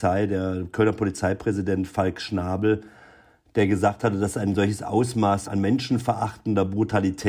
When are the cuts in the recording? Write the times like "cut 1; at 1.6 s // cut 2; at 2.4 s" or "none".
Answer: cut 1; at 5.4 s